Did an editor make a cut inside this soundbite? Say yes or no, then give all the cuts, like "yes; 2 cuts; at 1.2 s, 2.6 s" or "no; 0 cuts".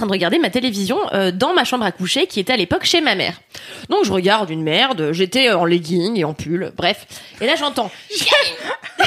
no; 0 cuts